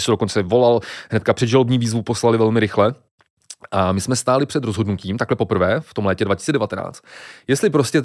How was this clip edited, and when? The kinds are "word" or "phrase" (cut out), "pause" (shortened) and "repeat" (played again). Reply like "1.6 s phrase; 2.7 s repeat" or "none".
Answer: none